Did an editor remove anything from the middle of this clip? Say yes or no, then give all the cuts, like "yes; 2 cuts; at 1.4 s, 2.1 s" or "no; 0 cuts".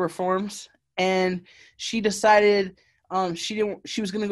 no; 0 cuts